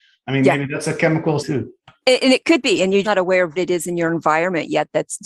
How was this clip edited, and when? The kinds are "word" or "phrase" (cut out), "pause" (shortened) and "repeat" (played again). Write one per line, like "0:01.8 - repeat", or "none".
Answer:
0:01.4 - word
0:03.0 - word
0:03.6 - word